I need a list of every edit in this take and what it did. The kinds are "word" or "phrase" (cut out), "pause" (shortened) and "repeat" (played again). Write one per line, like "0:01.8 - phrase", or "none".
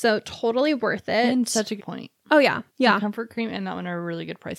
0:01.8 - phrase
0:02.7 - pause